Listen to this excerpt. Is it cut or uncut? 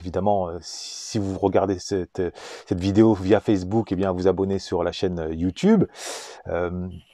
uncut